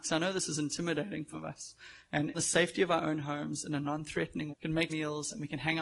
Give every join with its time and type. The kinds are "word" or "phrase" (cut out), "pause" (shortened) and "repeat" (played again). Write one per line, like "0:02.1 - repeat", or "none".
0:01.3 - word
0:02.3 - phrase
0:04.5 - word
0:04.9 - word